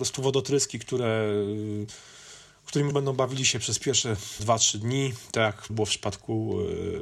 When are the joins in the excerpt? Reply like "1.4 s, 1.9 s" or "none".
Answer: 2.9 s, 4.4 s, 5.7 s